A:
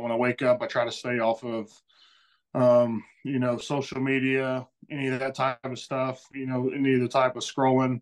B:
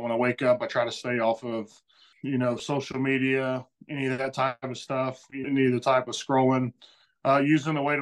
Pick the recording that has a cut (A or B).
B